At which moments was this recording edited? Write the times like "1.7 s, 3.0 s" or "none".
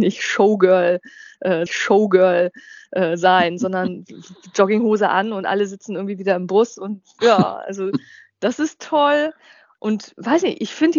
1.7 s